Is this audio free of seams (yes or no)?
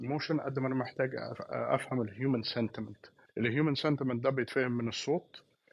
no